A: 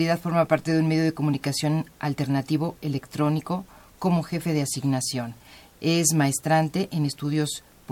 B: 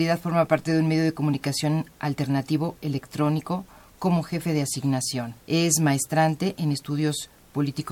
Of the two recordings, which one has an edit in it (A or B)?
B